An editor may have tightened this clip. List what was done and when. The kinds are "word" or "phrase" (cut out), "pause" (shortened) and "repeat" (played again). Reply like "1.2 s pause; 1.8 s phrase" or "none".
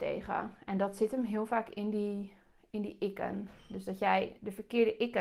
none